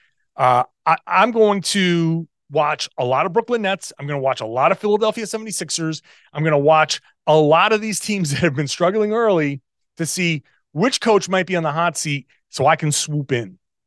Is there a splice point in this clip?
no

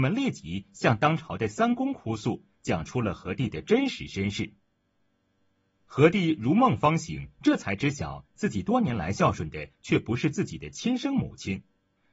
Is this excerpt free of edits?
yes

